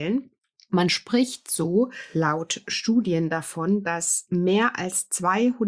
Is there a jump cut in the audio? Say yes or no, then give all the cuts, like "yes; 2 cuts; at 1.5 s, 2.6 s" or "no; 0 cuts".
no; 0 cuts